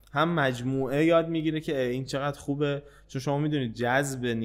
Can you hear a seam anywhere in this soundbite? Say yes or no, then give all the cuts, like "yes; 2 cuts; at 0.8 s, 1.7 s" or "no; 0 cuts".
no; 0 cuts